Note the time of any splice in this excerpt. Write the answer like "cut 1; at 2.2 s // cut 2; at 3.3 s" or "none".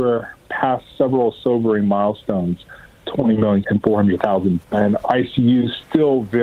cut 1; at 3.6 s // cut 2; at 4.6 s